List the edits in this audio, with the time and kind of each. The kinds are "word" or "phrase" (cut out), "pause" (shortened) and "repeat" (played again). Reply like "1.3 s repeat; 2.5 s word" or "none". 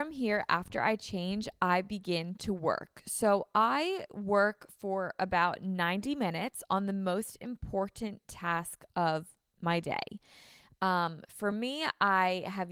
none